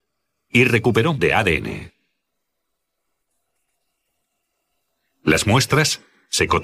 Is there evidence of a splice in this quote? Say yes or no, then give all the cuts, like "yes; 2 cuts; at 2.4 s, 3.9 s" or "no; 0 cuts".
yes; 1 cut; at 1.1 s